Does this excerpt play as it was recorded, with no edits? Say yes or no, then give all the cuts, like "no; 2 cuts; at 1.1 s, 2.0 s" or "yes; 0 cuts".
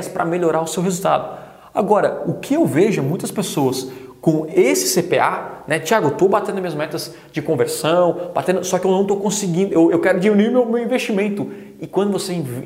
yes; 0 cuts